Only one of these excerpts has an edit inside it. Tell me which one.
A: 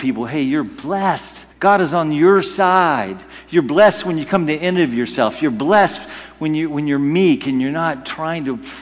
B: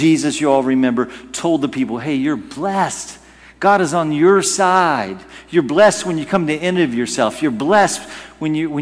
A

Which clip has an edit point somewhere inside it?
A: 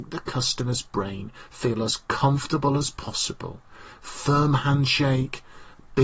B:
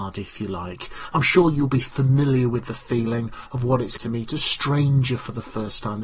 B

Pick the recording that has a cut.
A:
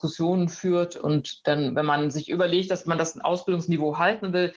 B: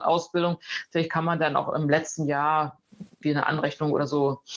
B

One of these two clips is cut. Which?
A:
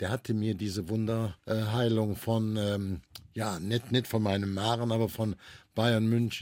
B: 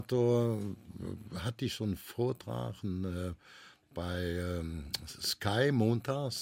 A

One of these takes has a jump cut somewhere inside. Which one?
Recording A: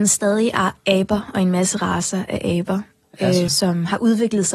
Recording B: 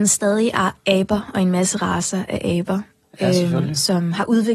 A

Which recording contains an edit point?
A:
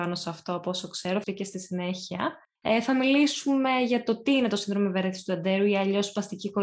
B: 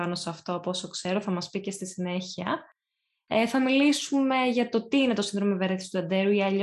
A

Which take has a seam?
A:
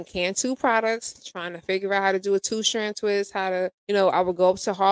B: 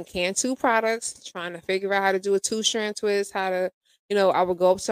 A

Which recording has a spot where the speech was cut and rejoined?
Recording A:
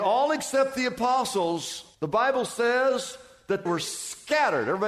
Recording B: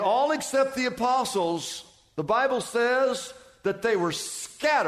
A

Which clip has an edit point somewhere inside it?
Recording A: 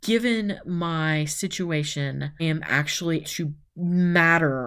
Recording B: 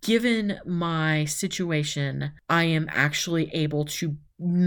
A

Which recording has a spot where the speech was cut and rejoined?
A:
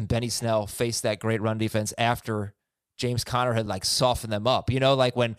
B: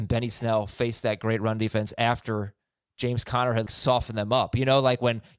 B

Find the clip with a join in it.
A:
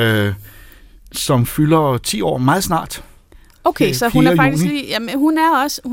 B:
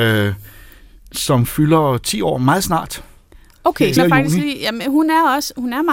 B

